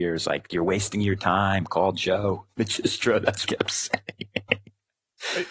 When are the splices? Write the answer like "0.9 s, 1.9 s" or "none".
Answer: 3.4 s